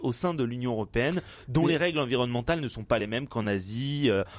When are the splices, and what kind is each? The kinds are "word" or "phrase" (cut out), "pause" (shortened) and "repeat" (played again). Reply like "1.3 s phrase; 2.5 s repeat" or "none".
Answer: none